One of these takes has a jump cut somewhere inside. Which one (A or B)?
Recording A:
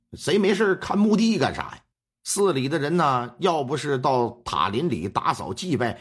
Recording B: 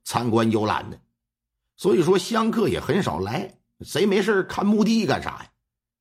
A